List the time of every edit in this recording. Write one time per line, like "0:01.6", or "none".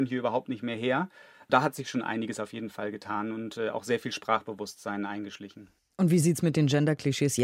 none